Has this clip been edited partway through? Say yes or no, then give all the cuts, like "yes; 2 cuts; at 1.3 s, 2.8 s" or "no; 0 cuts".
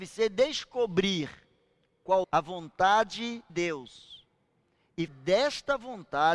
yes; 3 cuts; at 2.2 s, 3.5 s, 5.1 s